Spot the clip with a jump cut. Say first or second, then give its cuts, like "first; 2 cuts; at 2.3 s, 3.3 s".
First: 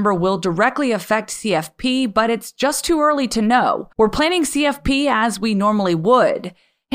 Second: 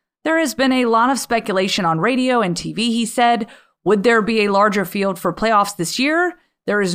first; 1 cut; at 3.9 s